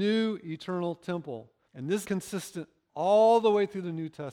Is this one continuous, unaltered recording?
no; 2 cuts; at 1.7 s, 2.0 s

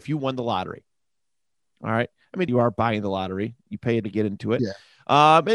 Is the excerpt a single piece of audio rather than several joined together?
no; 2 cuts; at 2.5 s, 4.0 s

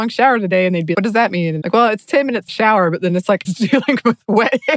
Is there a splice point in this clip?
yes; 4 cuts; at 0.9 s, 1.6 s, 2.5 s, 3.4 s

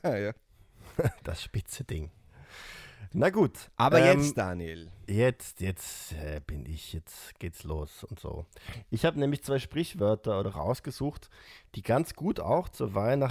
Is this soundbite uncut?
no; 1 cut; at 10.5 s

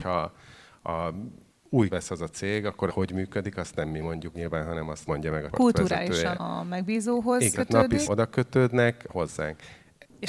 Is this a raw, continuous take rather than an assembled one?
no; 9 cuts; at 1.9 s, 2.9 s, 4.3 s, 5.1 s, 5.5 s, 6.3 s, 7.5 s, 8.0 s, 9.1 s

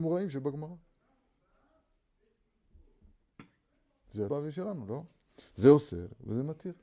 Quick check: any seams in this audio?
yes; 1 cut; at 4.3 s

